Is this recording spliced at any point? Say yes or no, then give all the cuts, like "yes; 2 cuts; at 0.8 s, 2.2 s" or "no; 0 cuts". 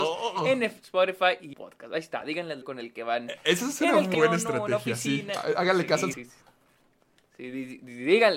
yes; 4 cuts; at 1.5 s, 2.6 s, 4.1 s, 6.1 s